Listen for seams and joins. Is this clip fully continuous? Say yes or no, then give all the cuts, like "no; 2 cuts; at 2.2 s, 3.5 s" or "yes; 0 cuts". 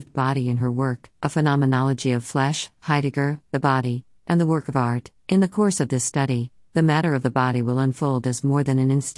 yes; 0 cuts